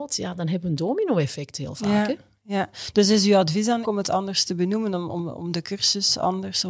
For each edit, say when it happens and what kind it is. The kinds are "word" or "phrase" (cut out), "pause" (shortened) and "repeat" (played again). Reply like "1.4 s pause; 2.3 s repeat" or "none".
3.8 s word